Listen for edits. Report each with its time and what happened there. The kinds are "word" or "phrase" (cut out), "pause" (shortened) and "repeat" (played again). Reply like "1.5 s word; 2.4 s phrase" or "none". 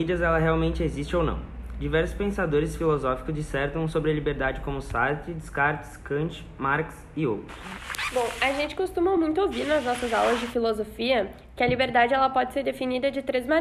none